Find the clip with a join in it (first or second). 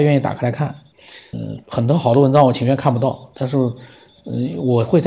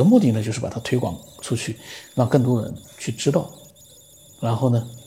first